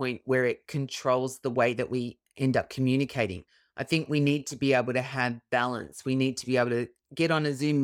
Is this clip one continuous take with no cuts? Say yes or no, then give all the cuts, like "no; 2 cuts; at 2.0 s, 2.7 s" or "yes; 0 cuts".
yes; 0 cuts